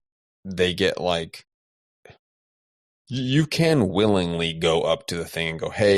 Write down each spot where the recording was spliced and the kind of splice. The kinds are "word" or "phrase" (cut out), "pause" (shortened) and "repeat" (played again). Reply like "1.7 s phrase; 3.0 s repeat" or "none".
none